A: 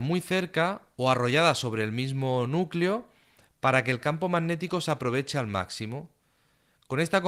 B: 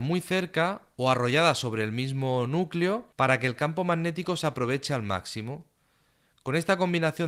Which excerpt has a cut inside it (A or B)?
B